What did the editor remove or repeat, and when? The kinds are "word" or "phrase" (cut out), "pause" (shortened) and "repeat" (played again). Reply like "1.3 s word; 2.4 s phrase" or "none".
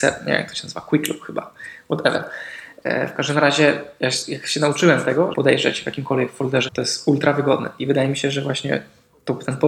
5.3 s phrase; 6.7 s word